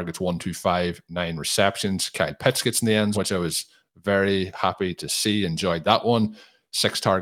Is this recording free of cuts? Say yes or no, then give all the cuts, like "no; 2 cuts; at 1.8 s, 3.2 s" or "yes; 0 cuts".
no; 1 cut; at 3.1 s